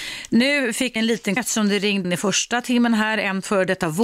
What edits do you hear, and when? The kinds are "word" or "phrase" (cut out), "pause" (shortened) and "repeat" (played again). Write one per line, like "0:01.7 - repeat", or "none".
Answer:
0:01.0 - word
0:01.4 - word
0:02.0 - word